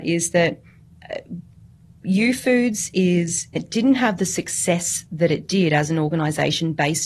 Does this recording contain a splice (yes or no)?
no